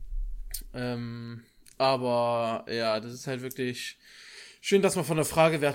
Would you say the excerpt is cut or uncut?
uncut